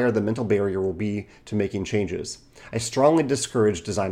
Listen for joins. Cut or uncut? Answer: uncut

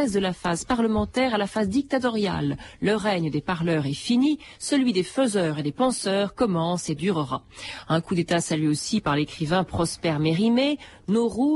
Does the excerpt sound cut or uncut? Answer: uncut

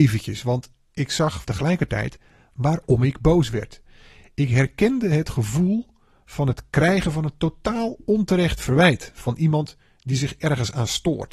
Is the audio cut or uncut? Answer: cut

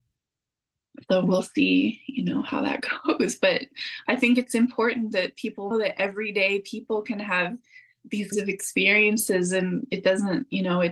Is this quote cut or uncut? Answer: cut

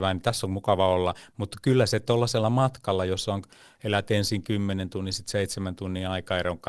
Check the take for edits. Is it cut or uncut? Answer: uncut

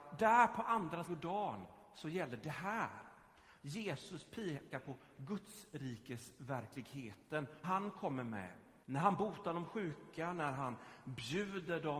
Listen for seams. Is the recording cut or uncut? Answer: cut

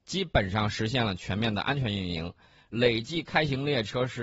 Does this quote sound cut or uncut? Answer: uncut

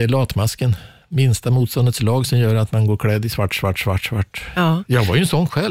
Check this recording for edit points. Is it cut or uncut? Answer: uncut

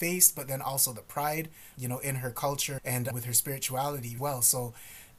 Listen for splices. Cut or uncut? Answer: cut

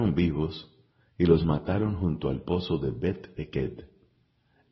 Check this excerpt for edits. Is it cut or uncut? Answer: uncut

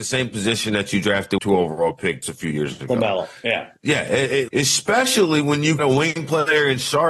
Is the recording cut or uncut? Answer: cut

